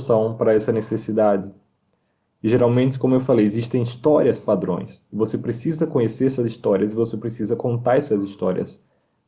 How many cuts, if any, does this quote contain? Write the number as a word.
zero